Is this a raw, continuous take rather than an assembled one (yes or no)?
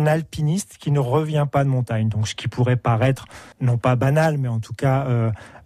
no